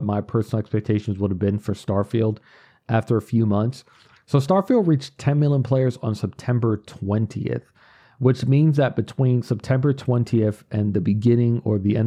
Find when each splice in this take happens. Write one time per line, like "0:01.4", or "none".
none